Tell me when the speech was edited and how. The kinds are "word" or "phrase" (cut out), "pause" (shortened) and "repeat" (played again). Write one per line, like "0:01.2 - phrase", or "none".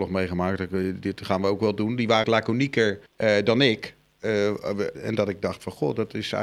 0:02.2 - word
0:03.1 - pause
0:04.9 - word